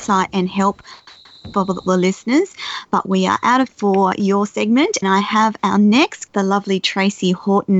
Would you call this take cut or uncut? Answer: cut